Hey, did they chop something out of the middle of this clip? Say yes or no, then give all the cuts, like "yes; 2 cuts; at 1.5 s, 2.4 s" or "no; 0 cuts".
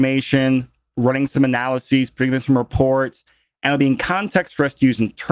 no; 0 cuts